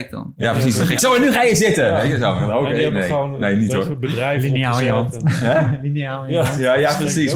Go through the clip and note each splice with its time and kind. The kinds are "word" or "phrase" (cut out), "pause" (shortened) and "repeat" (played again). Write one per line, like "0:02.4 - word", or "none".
none